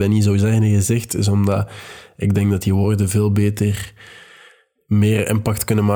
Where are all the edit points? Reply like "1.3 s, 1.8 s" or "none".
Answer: none